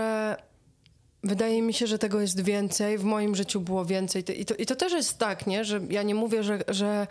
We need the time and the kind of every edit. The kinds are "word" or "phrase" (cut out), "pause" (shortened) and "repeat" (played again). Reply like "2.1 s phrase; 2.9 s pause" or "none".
none